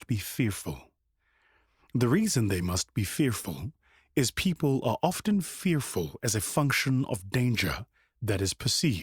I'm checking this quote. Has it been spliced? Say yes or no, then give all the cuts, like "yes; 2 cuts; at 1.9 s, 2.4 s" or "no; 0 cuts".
no; 0 cuts